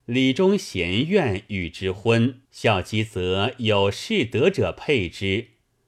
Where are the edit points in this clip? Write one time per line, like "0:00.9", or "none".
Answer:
0:02.4